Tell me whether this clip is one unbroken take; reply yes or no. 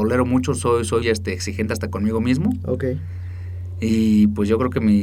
no